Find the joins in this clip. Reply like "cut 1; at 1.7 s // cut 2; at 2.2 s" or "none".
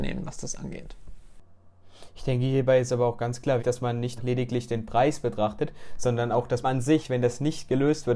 cut 1; at 3.6 s // cut 2; at 4.2 s // cut 3; at 6.6 s